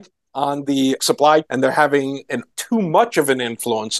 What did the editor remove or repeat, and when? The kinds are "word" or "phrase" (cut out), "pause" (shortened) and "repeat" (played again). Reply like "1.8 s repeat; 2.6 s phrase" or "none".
1.0 s word; 1.4 s word; 2.5 s word